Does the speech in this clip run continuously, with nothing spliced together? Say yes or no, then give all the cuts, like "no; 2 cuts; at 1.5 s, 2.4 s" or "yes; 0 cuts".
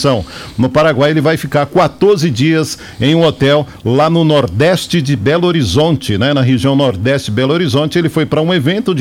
yes; 0 cuts